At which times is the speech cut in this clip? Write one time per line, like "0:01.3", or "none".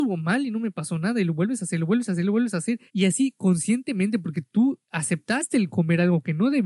0:02.9
0:04.8